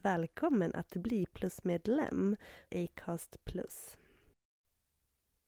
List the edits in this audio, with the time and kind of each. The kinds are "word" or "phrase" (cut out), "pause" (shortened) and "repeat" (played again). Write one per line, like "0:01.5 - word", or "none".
0:02.7 - word